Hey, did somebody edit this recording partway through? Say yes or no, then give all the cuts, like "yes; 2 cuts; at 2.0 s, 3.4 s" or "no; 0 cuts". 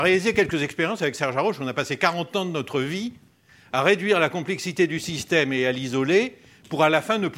no; 0 cuts